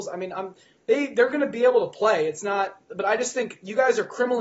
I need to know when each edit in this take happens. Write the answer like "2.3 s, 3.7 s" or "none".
none

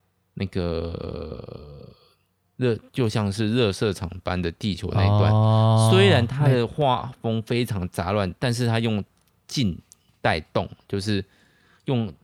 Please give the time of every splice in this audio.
none

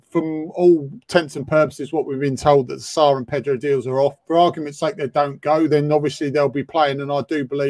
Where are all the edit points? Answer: 4.2 s

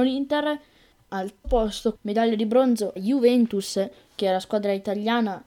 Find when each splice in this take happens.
1.1 s, 1.4 s, 2.0 s, 3.0 s

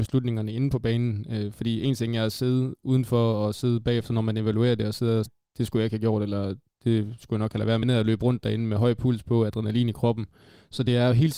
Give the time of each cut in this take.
5.3 s, 7.8 s

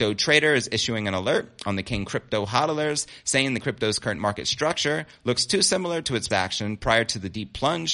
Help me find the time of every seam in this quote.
3.6 s, 6.3 s

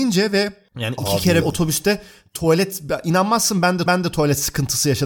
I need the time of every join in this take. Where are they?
1.4 s, 3.9 s

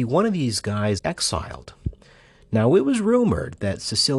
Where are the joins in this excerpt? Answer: 1.0 s

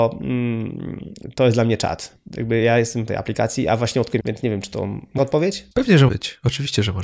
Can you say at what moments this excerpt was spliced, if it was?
2.3 s, 3.1 s, 4.2 s, 5.2 s, 5.7 s, 6.1 s

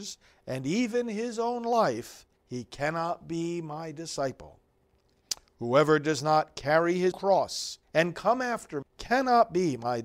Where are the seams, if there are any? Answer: 2.3 s, 7.1 s, 7.8 s, 8.8 s

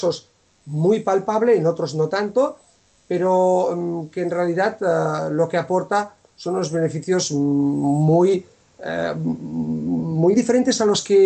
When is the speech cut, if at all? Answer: 10.3 s

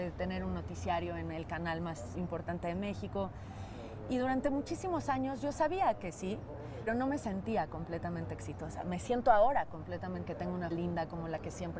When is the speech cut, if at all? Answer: 2.1 s, 6.9 s, 10.3 s, 10.7 s

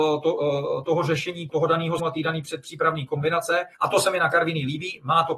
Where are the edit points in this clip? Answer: 1.5 s, 2.0 s, 3.7 s

